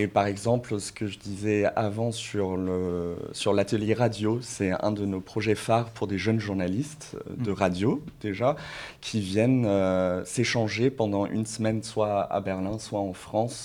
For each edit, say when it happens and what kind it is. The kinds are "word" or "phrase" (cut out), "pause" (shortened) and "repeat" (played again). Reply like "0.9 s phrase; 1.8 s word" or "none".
none